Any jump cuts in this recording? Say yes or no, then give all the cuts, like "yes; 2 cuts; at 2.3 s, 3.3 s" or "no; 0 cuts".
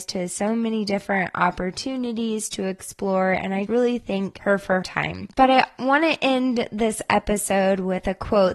yes; 2 cuts; at 3.7 s, 4.8 s